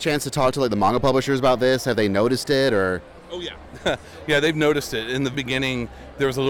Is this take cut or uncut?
cut